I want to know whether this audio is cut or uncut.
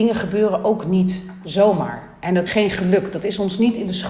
cut